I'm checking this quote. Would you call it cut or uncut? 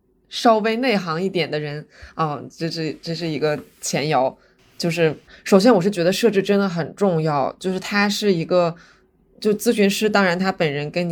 uncut